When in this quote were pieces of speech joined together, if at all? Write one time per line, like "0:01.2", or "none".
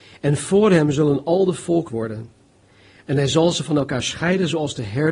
0:01.9